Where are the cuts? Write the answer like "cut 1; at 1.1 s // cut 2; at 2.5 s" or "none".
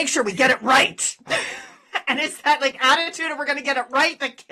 none